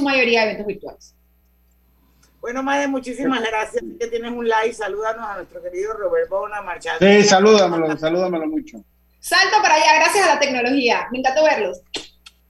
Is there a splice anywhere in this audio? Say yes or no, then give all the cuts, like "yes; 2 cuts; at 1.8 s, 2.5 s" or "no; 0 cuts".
no; 0 cuts